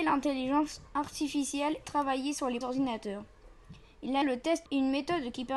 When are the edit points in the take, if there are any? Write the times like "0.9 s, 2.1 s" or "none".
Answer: 1.8 s, 2.6 s, 4.2 s, 4.7 s